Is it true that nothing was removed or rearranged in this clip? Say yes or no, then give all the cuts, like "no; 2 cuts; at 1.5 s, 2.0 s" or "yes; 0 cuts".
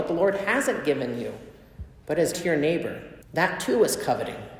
no; 2 cuts; at 2.3 s, 3.2 s